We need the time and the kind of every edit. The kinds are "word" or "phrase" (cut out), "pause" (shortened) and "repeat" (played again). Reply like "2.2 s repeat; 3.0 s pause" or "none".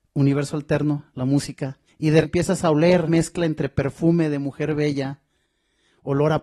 1.9 s pause; 2.2 s word; 3.1 s phrase